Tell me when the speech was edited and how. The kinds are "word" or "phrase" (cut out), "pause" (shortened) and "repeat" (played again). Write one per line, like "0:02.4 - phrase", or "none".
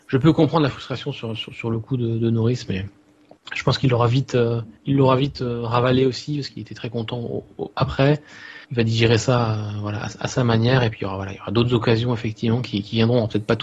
0:04.8 - pause
0:08.6 - pause